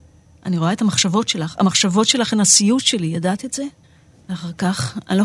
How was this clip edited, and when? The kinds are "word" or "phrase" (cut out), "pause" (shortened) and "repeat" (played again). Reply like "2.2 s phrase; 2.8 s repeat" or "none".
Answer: 3.8 s pause